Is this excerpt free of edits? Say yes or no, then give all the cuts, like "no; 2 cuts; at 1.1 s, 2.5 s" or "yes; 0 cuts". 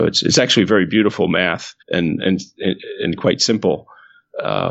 no; 2 cuts; at 1.8 s, 3.2 s